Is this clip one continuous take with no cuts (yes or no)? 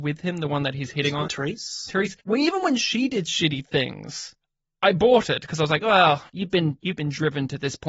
no